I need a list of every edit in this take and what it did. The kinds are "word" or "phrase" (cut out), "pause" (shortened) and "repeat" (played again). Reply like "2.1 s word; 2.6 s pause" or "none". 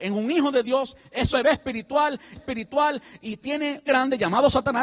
1.3 s word; 2.4 s repeat; 3.9 s phrase